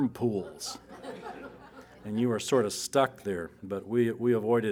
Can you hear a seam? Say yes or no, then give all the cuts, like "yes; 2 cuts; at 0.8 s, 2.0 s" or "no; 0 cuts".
yes; 1 cut; at 3.6 s